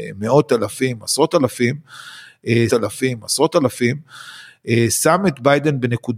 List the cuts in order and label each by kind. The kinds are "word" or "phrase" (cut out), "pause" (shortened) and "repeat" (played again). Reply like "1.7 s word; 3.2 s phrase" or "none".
2.7 s repeat